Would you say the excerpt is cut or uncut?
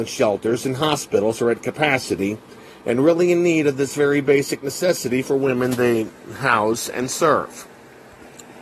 uncut